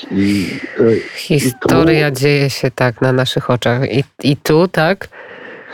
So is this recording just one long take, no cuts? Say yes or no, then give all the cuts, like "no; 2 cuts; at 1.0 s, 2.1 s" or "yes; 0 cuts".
yes; 0 cuts